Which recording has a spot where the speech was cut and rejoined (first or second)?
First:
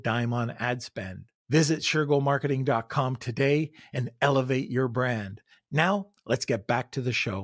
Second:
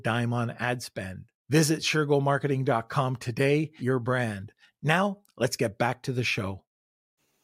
second